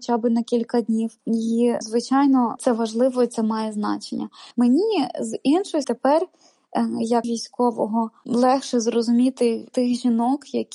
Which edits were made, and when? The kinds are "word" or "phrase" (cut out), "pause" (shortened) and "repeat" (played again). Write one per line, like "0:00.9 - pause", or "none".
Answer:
0:01.8 - word
0:04.5 - pause
0:05.8 - word
0:07.2 - word
0:09.7 - word

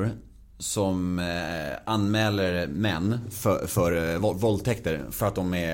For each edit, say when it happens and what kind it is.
none

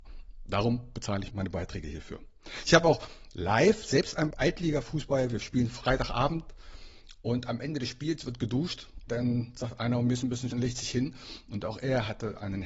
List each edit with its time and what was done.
0:01.3 - phrase
0:04.3 - phrase
0:09.1 - word
0:10.5 - word

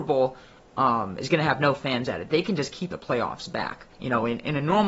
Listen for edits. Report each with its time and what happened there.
0:02.9 - phrase
0:03.9 - pause

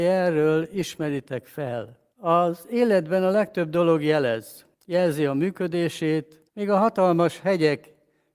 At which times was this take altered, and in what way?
0:02.1 - pause
0:04.7 - pause
0:06.5 - pause

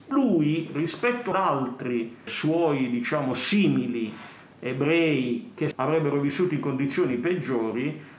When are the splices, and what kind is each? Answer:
0:01.3 - word
0:02.3 - word
0:05.7 - phrase

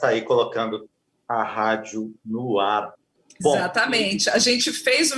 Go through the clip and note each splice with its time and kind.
none

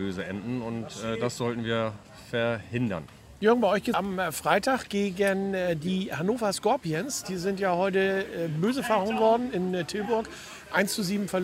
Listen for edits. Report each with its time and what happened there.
0:03.9 - phrase

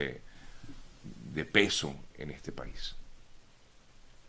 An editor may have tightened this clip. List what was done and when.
0:02.1 - word

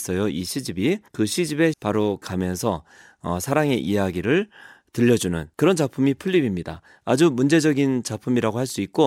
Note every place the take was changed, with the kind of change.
0:01.1 - pause
0:01.7 - word
0:02.2 - phrase
0:05.5 - pause

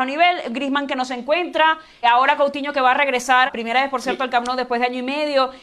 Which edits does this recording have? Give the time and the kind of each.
0:02.0 - word
0:03.5 - word

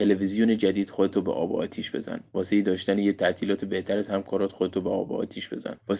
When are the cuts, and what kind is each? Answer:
none

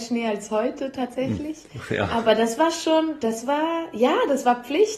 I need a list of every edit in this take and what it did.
none

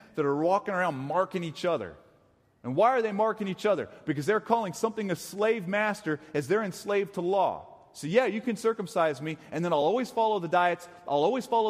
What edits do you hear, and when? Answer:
none

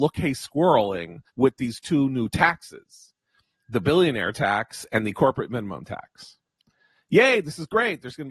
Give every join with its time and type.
0:01.3 - pause

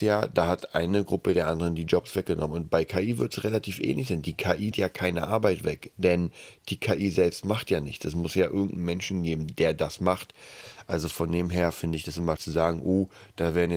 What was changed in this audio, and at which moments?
0:04.7 - word
0:12.4 - word

